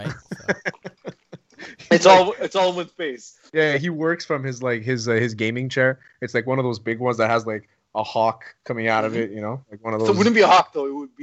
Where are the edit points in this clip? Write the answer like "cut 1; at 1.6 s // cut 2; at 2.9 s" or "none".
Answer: cut 1; at 3.5 s // cut 2; at 8.5 s

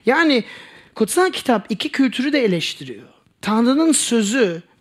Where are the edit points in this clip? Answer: cut 1; at 3.2 s

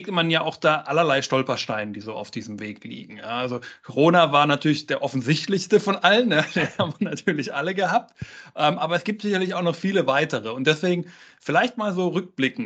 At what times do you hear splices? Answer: none

